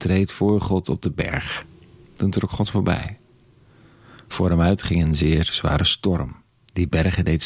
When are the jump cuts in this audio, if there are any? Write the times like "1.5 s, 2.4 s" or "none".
none